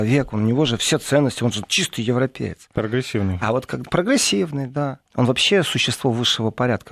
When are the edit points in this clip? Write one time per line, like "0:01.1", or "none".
0:05.1